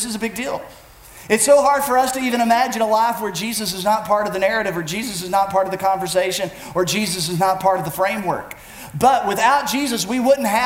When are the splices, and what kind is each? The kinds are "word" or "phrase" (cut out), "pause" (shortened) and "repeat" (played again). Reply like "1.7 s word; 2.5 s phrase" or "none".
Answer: none